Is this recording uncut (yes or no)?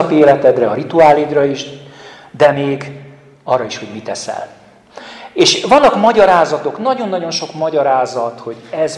yes